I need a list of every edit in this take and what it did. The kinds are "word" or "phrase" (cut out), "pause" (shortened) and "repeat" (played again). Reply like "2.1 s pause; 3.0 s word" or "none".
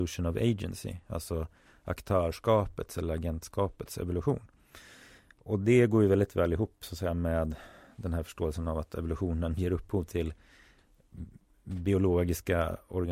none